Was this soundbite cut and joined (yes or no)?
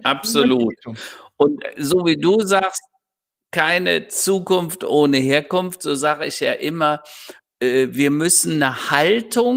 no